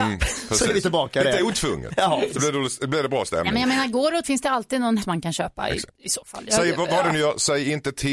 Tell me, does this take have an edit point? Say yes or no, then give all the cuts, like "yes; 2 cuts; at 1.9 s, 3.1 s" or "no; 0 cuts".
yes; 3 cuts; at 2.3 s, 4.2 s, 5.0 s